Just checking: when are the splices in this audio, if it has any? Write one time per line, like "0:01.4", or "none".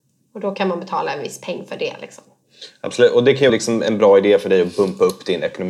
0:03.5